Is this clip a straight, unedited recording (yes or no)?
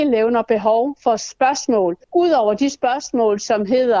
no